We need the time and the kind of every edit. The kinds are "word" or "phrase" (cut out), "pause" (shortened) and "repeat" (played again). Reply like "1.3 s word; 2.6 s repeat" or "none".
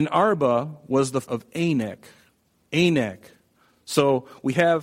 1.2 s word

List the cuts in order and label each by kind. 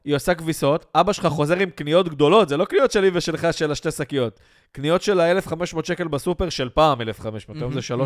none

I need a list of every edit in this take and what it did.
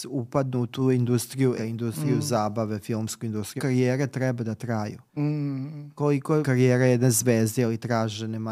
1.6 s word; 3.6 s phrase; 5.1 s pause; 6.4 s word

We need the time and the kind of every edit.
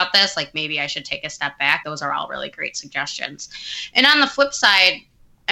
1.8 s word

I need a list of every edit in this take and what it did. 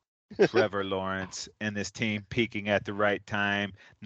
none

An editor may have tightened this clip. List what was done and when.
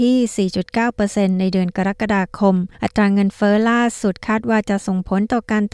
2.7 s pause

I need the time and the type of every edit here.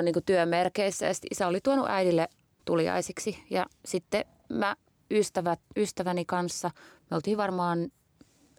2.6 s word; 4.9 s pause

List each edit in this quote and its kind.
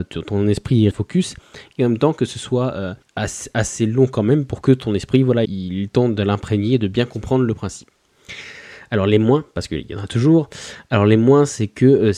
0.9 s word; 3.0 s pause; 5.4 s word

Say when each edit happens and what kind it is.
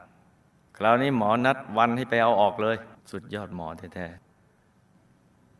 3.0 s pause

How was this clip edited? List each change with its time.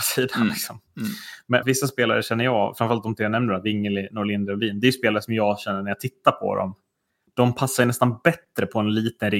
1.6 s phrase

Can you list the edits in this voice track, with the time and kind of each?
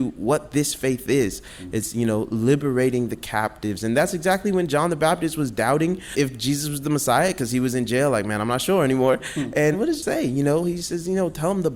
10.0 s word

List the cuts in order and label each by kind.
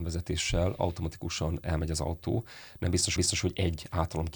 3.2 s repeat

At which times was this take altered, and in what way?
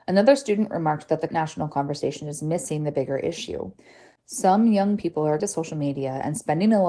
1.3 s word; 5.4 s word

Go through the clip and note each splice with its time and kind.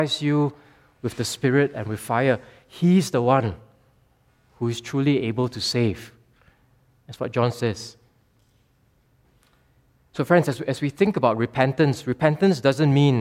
none

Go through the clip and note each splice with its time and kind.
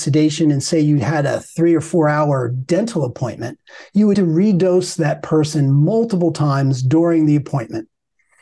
4.1 s word

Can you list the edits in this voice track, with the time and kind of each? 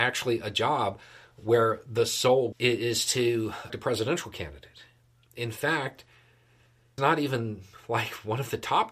2.5 s word; 3.7 s word; 7.0 s word

